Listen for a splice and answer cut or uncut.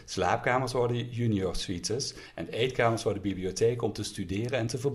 uncut